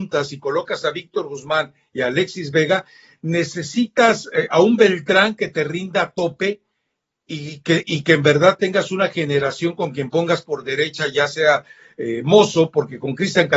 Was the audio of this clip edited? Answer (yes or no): no